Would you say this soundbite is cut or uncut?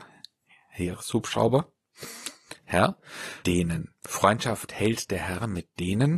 cut